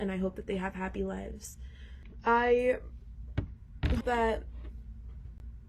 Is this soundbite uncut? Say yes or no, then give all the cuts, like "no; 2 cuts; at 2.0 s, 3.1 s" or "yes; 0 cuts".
no; 1 cut; at 4.0 s